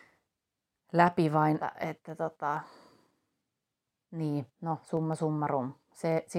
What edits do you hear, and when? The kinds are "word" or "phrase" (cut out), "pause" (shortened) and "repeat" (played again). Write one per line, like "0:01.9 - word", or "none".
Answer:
0:01.6 - phrase